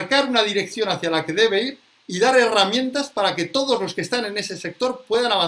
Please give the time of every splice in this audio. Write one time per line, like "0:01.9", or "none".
none